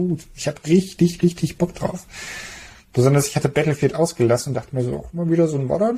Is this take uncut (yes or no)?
yes